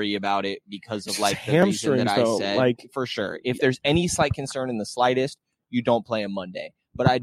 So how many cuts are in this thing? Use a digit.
0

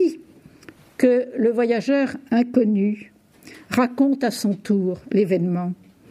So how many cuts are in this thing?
0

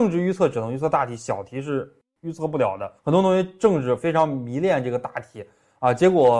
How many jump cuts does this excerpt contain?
1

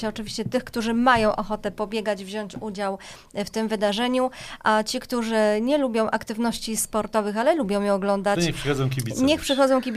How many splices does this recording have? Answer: 0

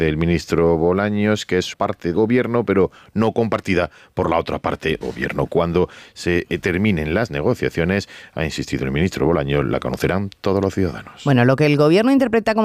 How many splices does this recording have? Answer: 3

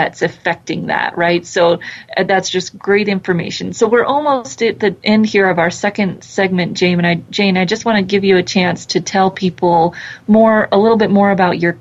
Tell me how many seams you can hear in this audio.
0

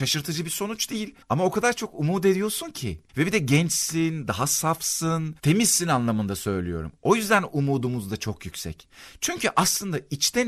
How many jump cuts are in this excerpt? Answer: 2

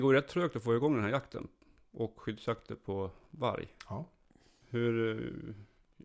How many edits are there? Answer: 0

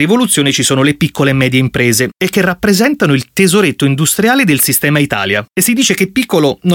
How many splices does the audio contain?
1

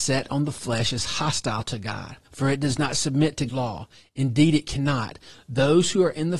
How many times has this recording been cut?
2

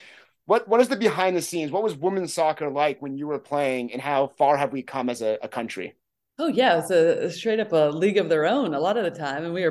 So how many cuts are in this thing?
0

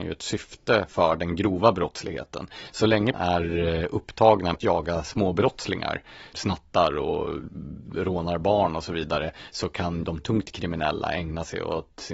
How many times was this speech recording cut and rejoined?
4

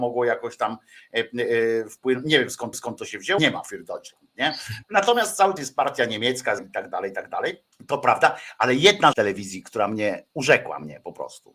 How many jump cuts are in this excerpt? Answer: 7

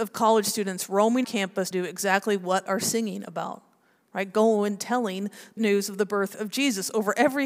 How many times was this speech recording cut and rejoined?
4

